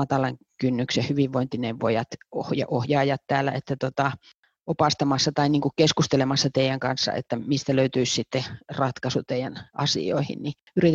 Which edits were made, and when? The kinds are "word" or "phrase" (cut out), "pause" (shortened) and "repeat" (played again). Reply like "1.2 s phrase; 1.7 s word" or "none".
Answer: none